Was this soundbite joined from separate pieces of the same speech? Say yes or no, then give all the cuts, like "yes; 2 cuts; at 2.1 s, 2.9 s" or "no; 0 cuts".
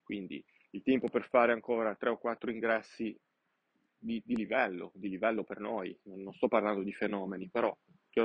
no; 0 cuts